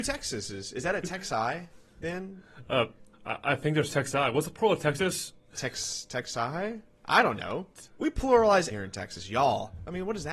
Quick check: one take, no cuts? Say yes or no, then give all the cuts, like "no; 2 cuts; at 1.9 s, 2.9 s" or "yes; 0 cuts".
no; 3 cuts; at 3.1 s, 7.9 s, 8.7 s